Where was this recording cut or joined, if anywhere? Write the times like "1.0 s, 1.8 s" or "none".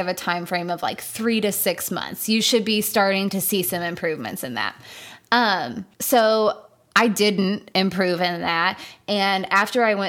5.9 s